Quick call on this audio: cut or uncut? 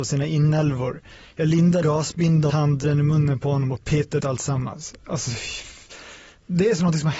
cut